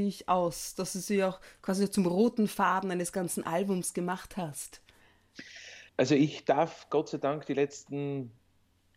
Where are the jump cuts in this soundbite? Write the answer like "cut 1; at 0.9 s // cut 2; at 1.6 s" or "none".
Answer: cut 1; at 5.9 s